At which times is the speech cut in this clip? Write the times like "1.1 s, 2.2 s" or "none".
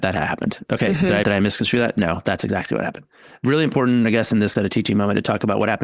1.2 s, 4.5 s